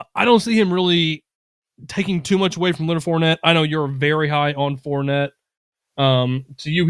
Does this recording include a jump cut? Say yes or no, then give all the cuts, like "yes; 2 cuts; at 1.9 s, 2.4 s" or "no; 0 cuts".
no; 0 cuts